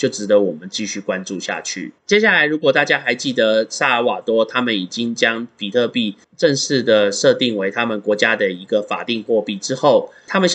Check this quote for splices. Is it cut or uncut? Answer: cut